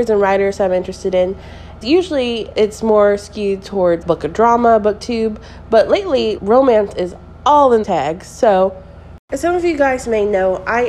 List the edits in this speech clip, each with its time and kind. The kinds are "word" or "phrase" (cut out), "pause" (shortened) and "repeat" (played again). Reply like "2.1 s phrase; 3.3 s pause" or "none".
1.8 s word; 2.5 s word; 4.0 s phrase; 6.4 s word; 7.8 s word